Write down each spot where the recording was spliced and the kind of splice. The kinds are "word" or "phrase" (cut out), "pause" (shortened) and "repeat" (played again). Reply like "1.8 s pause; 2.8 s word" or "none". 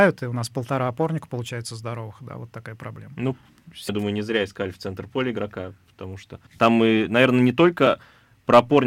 3.9 s word; 6.5 s pause